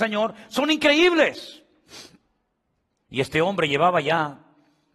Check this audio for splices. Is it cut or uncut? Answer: uncut